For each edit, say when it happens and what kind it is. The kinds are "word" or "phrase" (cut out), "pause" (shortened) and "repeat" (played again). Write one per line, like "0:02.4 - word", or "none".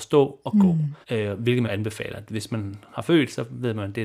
0:01.0 - pause
0:01.6 - phrase